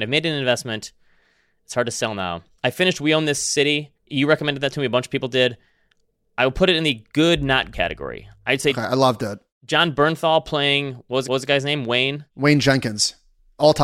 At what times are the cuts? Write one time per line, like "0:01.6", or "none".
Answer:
0:04.0
0:07.7
0:11.3